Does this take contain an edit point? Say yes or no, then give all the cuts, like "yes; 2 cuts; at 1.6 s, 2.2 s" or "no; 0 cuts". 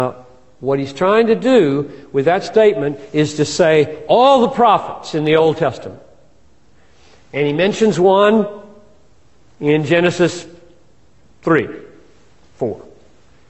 no; 0 cuts